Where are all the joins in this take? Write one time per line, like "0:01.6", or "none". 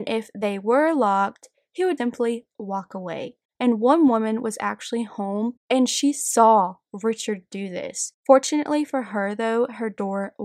0:02.0